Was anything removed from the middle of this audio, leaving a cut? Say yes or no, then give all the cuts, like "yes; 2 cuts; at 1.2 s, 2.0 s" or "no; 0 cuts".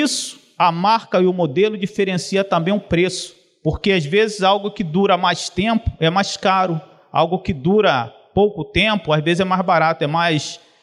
no; 0 cuts